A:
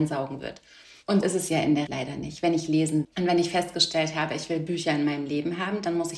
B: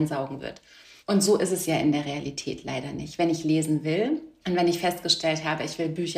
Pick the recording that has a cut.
A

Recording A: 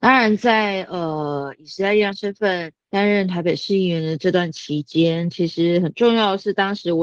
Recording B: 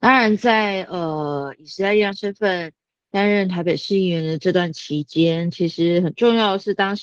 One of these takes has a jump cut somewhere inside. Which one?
A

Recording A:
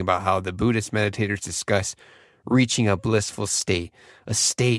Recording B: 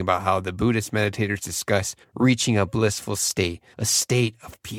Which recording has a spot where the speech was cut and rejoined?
B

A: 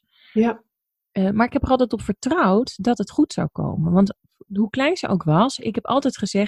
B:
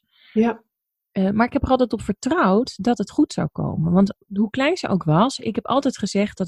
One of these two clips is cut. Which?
B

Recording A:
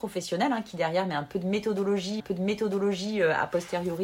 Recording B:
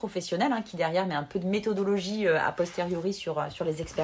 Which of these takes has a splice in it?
A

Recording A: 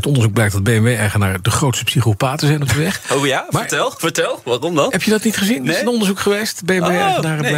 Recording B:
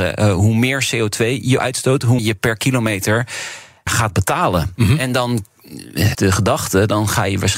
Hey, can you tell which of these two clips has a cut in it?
B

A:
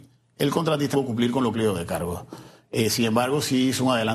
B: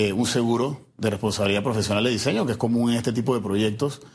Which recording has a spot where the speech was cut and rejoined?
A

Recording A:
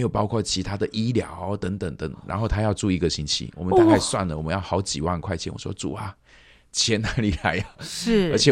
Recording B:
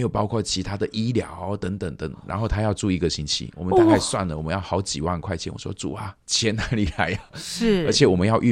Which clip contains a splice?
B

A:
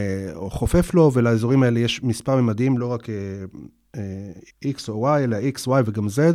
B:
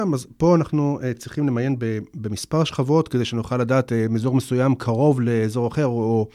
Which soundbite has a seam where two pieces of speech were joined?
A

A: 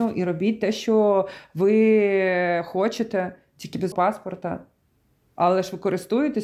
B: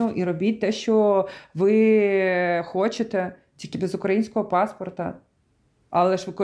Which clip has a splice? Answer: A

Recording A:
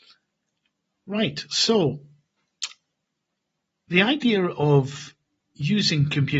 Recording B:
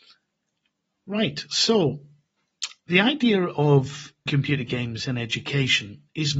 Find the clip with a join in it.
B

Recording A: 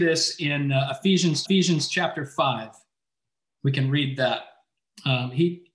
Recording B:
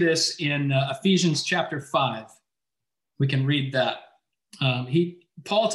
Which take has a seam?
A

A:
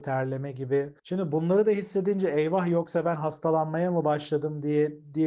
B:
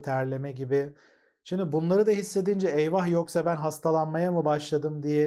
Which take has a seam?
A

